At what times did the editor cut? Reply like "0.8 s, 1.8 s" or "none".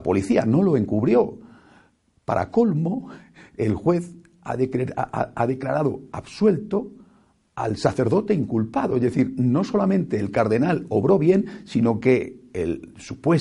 none